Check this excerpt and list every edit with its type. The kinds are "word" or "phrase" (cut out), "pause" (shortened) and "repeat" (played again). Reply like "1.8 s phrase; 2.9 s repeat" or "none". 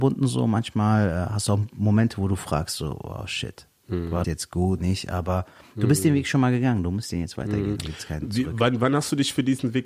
4.2 s word; 4.8 s word

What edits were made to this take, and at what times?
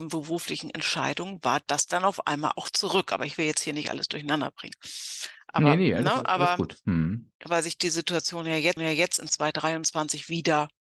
8.8 s repeat

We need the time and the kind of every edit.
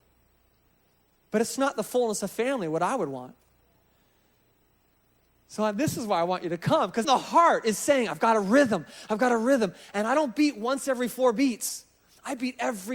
7.0 s word

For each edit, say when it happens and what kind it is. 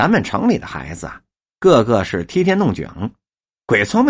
none

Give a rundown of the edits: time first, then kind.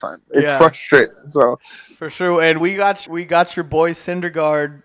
2.6 s word; 3.1 s word

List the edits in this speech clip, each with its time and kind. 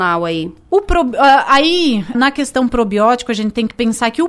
2.1 s word

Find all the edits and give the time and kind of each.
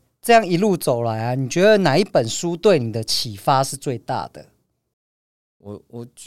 none

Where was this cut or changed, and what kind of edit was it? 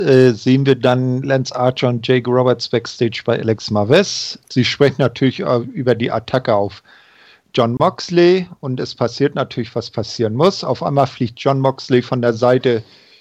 none

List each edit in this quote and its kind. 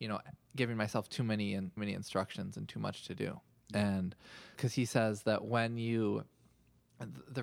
1.8 s word; 4.5 s word

